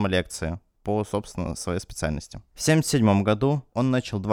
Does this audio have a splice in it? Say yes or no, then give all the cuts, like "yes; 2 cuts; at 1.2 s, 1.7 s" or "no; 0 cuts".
no; 0 cuts